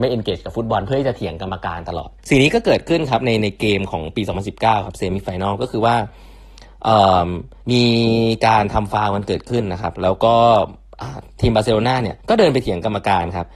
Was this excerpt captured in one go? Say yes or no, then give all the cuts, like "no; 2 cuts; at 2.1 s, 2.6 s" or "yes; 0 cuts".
no; 3 cuts; at 2.2 s, 7.6 s, 12.2 s